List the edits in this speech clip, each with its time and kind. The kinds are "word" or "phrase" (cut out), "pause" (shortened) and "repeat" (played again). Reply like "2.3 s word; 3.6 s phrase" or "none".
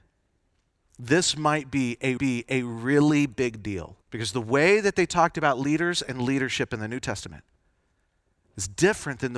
2.2 s repeat; 4.0 s pause